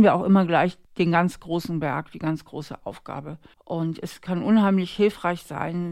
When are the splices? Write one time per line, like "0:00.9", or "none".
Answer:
0:03.5